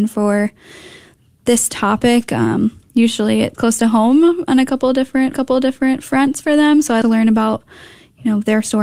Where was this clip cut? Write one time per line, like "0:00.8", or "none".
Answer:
0:03.5
0:05.3
0:07.0